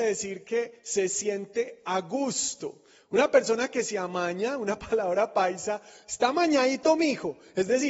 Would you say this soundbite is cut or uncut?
uncut